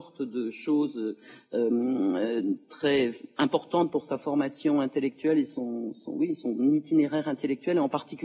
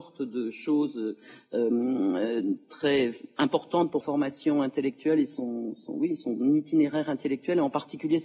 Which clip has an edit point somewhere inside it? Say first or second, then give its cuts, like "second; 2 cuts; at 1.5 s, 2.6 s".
second; 1 cut; at 4.0 s